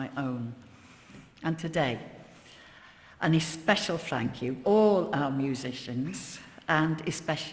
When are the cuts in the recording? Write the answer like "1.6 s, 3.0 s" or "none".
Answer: 4.6 s